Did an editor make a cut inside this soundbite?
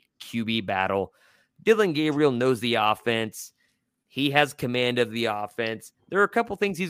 no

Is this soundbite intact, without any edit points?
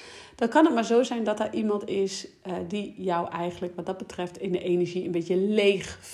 yes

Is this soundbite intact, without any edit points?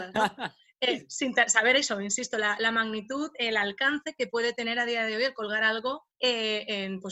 no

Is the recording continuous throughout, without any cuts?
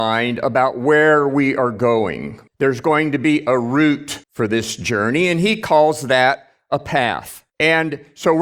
no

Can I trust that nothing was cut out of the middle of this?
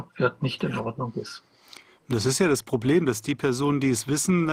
yes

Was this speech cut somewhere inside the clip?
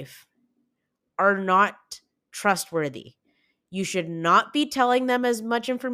no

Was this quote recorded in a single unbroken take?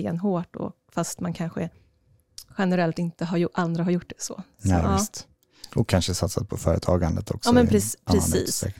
no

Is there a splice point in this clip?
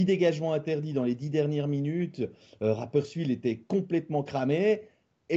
no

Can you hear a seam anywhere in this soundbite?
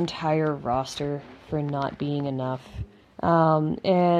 yes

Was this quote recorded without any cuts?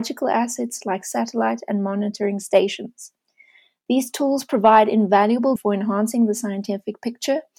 no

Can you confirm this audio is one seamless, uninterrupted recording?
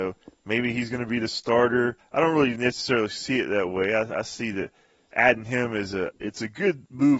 yes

